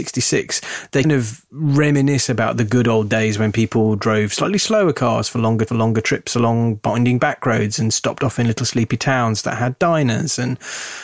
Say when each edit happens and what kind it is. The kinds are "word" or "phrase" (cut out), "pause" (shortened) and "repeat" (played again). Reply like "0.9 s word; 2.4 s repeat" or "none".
1.0 s word; 5.7 s repeat